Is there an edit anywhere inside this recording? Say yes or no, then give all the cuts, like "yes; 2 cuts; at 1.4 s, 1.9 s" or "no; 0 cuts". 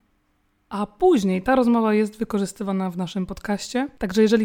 no; 0 cuts